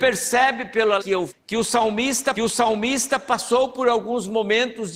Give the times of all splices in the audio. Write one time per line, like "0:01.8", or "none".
0:01.0
0:01.3
0:02.3